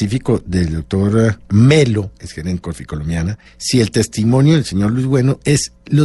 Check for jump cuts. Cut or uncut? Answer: cut